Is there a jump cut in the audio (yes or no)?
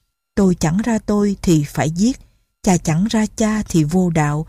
no